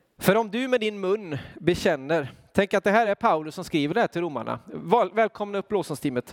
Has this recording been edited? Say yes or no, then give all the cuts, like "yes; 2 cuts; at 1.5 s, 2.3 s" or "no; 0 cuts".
no; 0 cuts